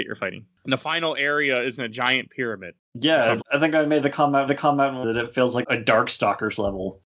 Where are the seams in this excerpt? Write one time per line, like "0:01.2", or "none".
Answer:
0:01.8
0:03.4
0:04.5
0:05.0
0:05.6